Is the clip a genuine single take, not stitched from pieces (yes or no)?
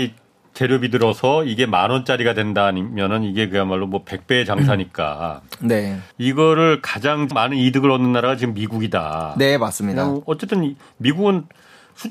no